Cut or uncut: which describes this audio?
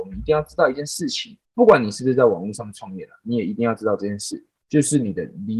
cut